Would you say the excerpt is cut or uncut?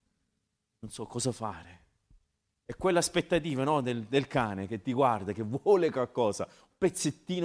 uncut